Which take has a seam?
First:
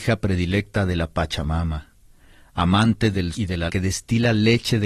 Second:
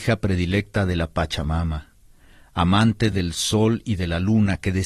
first; 2 cuts; at 3.3 s, 3.7 s

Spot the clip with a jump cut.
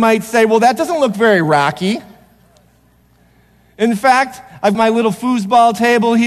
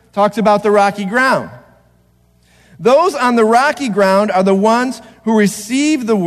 first; 1 cut; at 4.7 s

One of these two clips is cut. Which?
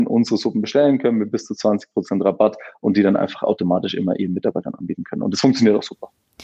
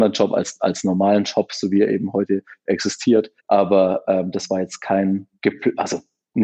second; 2 cuts; at 3.4 s, 5.3 s

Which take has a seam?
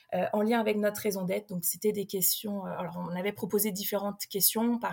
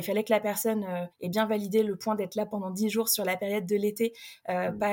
second; 1 cut; at 1.1 s

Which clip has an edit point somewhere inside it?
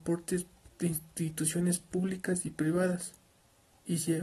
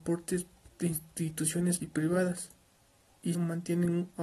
second; 2 cuts; at 1.8 s, 3.3 s

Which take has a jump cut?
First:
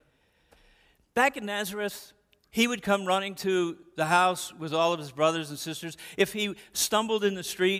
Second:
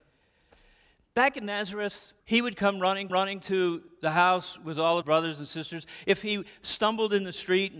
second; 3 cuts; at 2.2 s, 3.1 s, 5.0 s

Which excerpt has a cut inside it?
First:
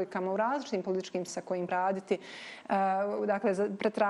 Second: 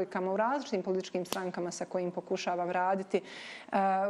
first; 2 cuts; at 1.3 s, 1.7 s

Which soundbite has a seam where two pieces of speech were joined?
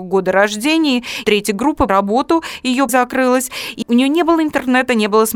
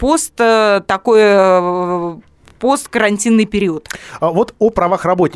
first; 4 cuts; at 1.2 s, 1.9 s, 2.9 s, 3.8 s

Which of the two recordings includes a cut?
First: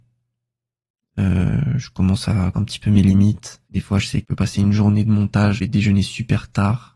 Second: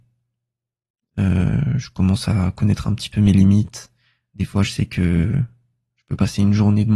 first; 4 cuts; at 2.5 s, 3.6 s, 4.2 s, 5.6 s

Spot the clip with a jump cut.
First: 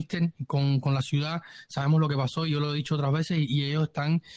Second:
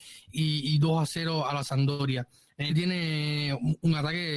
second; 1 cut; at 2.7 s

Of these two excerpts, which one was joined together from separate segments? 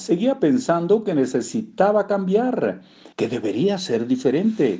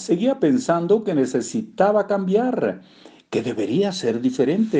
first; 1 cut; at 3.1 s

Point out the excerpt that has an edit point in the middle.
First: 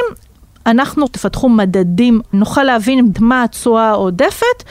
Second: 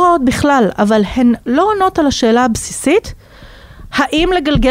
first; 3 cuts; at 1.1 s, 2.3 s, 3.1 s

